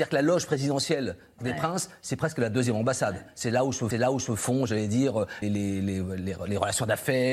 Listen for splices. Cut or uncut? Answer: cut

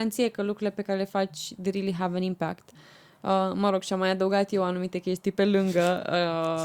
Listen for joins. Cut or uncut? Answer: uncut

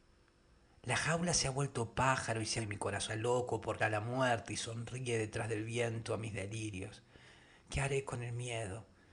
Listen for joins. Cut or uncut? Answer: cut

